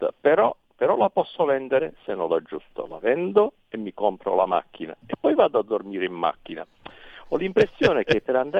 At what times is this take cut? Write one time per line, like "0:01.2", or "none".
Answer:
none